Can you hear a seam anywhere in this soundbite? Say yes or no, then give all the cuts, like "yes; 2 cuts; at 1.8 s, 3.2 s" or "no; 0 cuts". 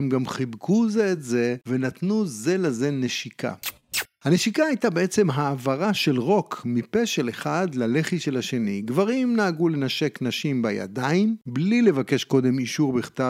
no; 0 cuts